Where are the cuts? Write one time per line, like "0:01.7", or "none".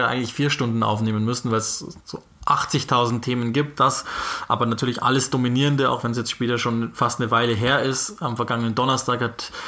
none